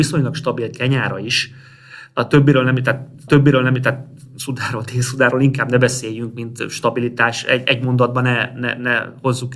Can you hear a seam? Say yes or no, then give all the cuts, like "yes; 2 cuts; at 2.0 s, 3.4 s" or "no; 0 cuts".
yes; 1 cut; at 3.3 s